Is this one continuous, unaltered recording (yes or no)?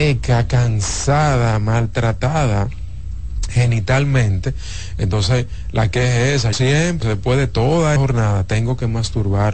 no